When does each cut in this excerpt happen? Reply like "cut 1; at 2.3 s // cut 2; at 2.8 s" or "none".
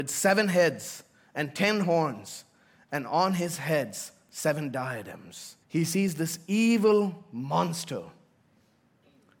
cut 1; at 5.6 s